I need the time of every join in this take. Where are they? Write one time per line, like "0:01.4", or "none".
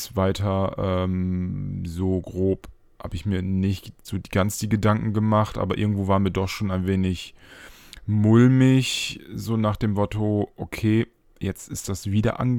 none